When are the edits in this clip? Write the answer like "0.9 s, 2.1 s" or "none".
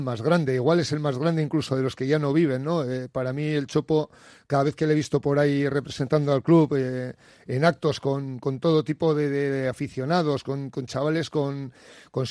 none